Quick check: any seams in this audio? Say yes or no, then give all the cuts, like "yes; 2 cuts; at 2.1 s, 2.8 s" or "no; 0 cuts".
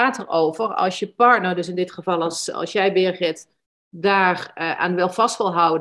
no; 0 cuts